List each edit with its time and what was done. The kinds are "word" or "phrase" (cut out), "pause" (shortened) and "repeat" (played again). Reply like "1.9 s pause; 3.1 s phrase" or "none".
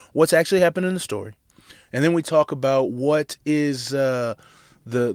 none